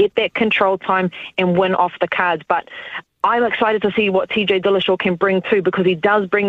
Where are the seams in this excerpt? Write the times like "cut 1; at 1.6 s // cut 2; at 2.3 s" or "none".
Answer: none